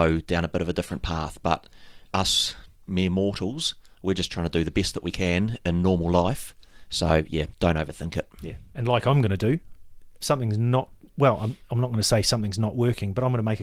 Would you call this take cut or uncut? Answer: cut